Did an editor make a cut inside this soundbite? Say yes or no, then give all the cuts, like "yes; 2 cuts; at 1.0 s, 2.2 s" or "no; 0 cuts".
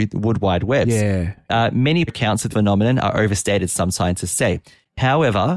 yes; 2 cuts; at 2.1 s, 2.5 s